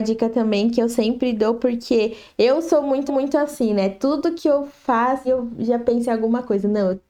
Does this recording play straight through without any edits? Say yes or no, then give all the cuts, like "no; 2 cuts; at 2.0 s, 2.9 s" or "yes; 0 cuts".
no; 2 cuts; at 3.1 s, 5.2 s